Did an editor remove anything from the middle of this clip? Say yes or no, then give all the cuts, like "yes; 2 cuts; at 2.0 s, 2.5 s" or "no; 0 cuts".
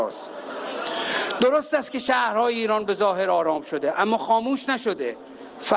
no; 0 cuts